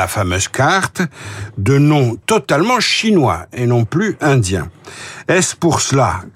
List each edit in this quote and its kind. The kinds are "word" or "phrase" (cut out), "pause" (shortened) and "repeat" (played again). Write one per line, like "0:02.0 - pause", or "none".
0:02.2 - word

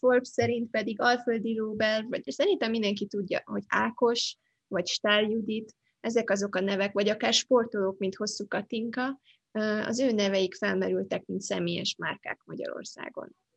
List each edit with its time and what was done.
0:02.3 - word
0:03.7 - word

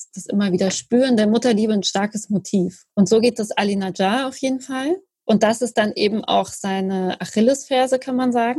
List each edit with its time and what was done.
0:02.9 - pause

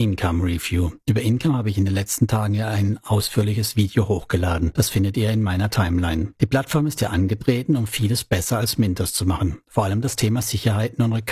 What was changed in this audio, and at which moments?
none

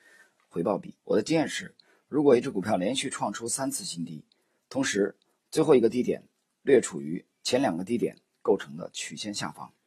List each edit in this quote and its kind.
0:01.0 - pause

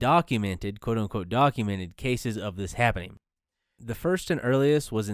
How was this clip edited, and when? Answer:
none

